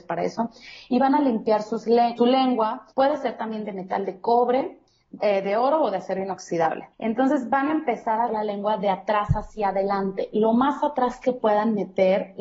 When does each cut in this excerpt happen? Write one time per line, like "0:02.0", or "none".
0:02.2
0:02.9
0:05.2
0:06.9
0:08.3